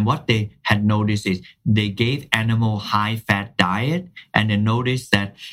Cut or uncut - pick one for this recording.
uncut